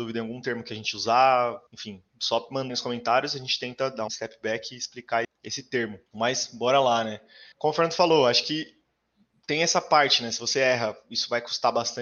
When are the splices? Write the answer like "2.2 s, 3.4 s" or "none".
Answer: 1.7 s, 2.7 s, 4.1 s, 5.2 s, 6.1 s, 7.5 s